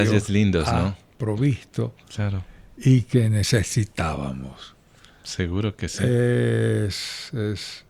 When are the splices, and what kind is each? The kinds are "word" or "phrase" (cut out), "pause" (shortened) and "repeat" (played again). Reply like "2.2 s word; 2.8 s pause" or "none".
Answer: none